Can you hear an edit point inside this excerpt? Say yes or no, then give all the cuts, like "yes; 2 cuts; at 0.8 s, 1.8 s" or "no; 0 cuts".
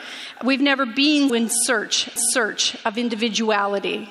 yes; 2 cuts; at 1.3 s, 2.2 s